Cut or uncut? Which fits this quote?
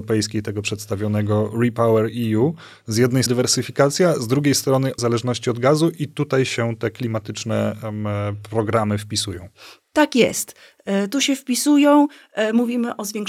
cut